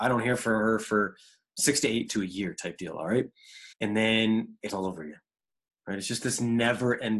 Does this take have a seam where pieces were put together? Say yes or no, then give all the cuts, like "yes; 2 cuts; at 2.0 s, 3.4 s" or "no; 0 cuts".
yes; 3 cuts; at 2.1 s, 3.7 s, 4.7 s